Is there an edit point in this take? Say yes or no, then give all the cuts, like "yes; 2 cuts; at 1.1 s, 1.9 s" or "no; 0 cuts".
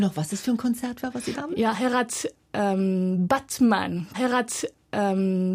yes; 2 cuts; at 1.3 s, 4.1 s